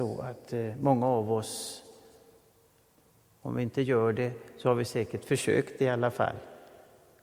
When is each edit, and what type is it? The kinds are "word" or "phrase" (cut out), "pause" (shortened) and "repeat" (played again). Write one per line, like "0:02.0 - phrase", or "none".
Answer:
none